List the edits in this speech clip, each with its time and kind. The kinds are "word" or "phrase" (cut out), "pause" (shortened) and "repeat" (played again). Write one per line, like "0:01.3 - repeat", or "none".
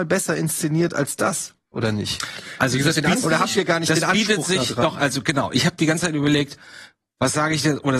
0:03.1 - word